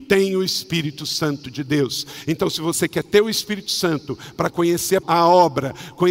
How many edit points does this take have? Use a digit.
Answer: 1